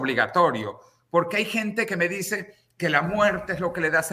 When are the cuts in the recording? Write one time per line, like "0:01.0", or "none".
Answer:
none

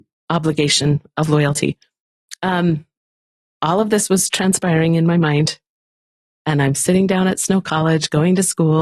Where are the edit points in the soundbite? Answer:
none

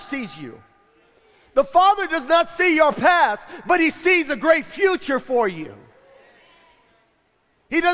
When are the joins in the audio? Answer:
none

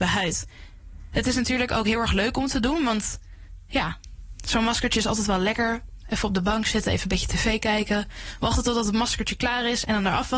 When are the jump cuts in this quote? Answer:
none

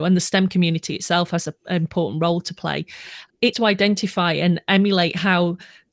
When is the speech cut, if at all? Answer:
0:03.5

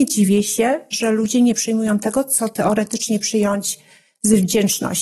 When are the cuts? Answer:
0:03.2

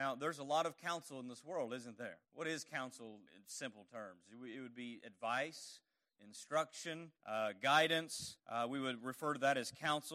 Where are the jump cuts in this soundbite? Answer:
0:02.2
0:03.3
0:07.2
0:08.4

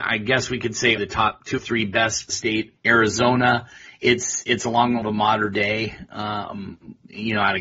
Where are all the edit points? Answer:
0:01.0
0:01.6
0:02.3
0:02.8
0:05.0

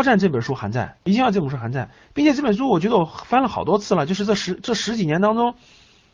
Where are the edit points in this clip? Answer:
0:01.0

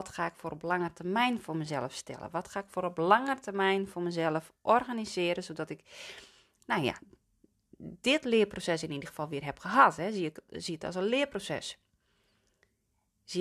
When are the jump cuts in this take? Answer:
none

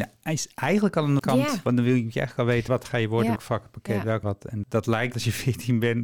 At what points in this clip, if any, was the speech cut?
0:01.2
0:02.7
0:03.4
0:04.2
0:04.6
0:05.1

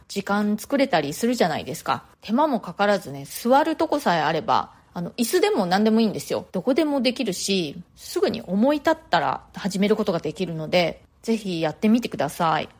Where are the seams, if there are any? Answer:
0:02.1
0:06.5
0:07.9
0:11.1

